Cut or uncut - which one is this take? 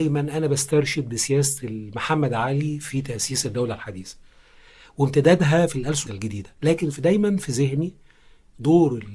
cut